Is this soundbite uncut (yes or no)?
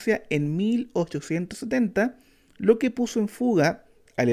yes